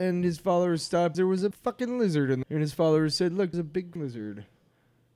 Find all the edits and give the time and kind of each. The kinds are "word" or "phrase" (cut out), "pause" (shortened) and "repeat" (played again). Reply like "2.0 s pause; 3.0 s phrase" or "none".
1.1 s word; 1.5 s word; 2.4 s word; 3.5 s word; 4.0 s word